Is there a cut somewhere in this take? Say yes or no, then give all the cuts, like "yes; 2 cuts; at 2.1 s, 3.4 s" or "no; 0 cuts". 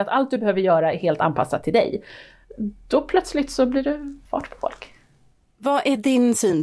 yes; 2 cuts; at 4.3 s, 5.3 s